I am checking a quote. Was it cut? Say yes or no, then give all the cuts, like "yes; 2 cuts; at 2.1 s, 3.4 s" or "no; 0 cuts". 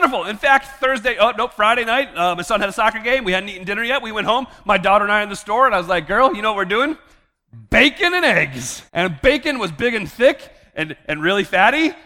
yes; 1 cut; at 8.9 s